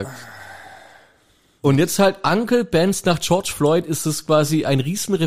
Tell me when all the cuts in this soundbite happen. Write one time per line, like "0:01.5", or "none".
none